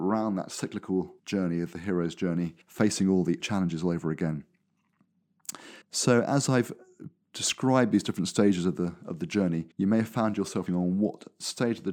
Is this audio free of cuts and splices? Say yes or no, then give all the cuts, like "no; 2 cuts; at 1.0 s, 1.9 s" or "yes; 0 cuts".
no; 6 cuts; at 1.2 s, 2.6 s, 3.4 s, 5.8 s, 9.7 s, 10.7 s